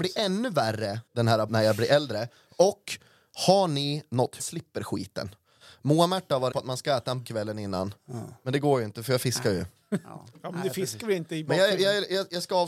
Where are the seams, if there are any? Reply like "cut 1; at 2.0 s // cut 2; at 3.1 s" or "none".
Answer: cut 1; at 1.1 s // cut 2; at 1.5 s // cut 3; at 4.4 s // cut 4; at 6.5 s // cut 5; at 7.2 s